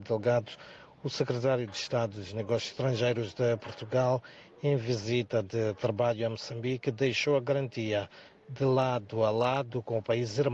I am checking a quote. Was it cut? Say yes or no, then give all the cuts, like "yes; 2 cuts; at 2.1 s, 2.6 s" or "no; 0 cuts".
no; 0 cuts